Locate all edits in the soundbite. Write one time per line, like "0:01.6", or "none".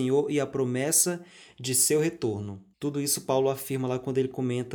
0:02.7